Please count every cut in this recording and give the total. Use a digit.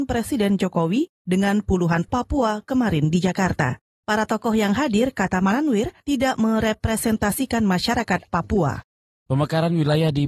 2